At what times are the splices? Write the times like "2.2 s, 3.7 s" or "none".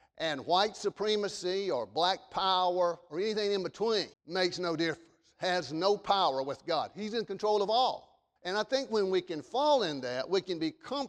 4.1 s, 8.4 s